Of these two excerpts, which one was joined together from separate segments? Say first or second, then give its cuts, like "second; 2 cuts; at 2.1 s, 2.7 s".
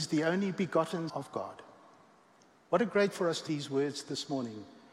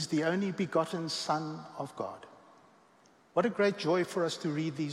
first; 3 cuts; at 1.1 s, 3.1 s, 3.5 s